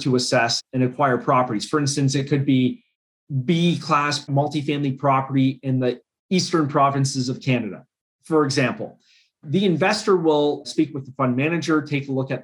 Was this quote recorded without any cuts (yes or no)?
yes